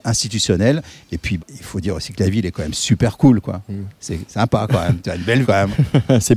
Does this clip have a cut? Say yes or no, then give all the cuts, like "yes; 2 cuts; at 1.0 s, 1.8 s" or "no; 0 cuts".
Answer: yes; 2 cuts; at 1.4 s, 5.4 s